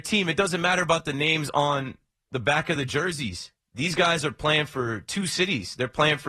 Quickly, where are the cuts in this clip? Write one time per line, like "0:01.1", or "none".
none